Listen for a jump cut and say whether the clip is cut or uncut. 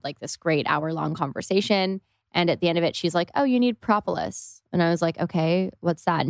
uncut